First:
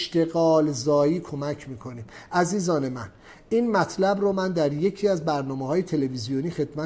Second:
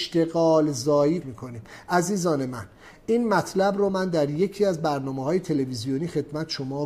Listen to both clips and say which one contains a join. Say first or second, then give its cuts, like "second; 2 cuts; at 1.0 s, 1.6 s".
second; 1 cut; at 1.2 s